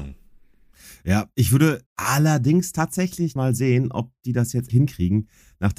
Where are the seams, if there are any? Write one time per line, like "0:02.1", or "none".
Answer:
0:01.9
0:03.4
0:04.7